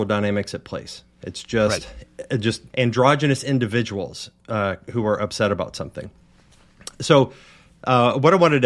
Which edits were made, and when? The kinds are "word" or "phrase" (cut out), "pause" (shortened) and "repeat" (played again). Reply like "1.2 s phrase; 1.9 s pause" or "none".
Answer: 2.7 s pause